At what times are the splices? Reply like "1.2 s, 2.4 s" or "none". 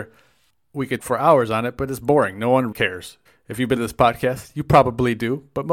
1.0 s, 2.7 s, 3.3 s, 3.8 s